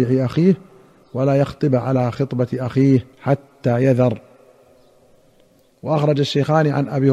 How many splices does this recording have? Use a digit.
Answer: 1